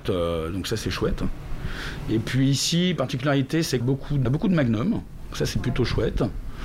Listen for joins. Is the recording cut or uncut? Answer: cut